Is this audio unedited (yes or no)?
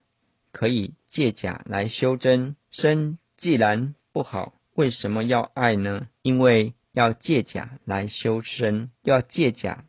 no